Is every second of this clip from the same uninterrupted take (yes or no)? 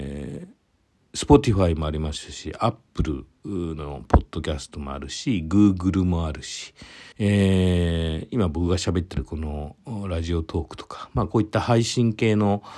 no